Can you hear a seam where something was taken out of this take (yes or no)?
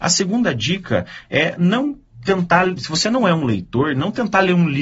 no